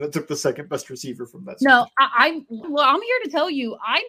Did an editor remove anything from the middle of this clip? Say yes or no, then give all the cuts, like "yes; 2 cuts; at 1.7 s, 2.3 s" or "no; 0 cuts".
yes; 1 cut; at 2.6 s